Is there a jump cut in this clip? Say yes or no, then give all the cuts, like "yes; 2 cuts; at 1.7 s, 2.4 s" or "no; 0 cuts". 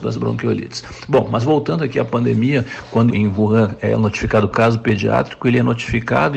yes; 2 cuts; at 3.1 s, 4.5 s